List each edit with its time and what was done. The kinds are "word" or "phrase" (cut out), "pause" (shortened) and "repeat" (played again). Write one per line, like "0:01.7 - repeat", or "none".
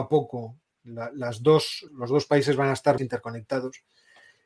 0:01.9 - word
0:03.0 - phrase